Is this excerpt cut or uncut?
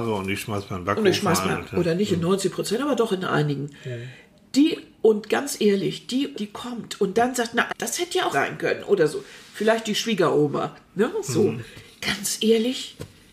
cut